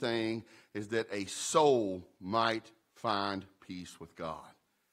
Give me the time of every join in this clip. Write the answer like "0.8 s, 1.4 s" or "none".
none